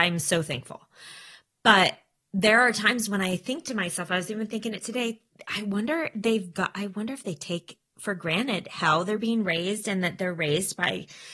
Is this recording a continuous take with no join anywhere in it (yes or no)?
yes